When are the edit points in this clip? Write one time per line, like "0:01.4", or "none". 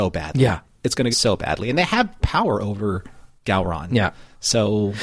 0:01.1
0:02.2